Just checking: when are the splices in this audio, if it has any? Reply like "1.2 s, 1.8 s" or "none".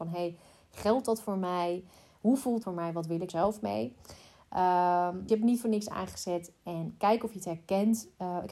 2.6 s, 3.3 s, 5.3 s